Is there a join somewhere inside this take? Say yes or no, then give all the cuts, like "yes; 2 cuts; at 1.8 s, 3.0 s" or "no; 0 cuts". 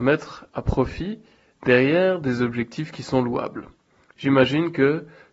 no; 0 cuts